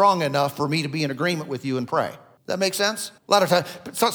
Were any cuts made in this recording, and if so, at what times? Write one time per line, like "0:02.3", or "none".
0:02.4
0:03.2